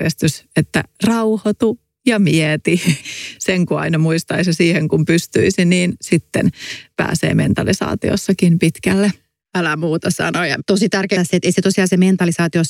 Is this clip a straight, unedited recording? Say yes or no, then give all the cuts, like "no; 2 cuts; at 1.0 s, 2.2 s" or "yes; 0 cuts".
no; 1 cut; at 11.2 s